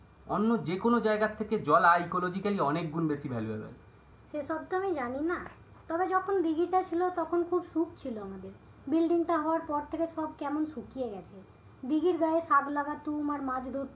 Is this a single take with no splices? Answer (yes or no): yes